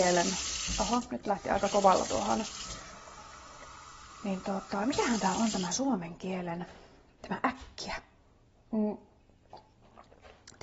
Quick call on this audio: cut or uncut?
cut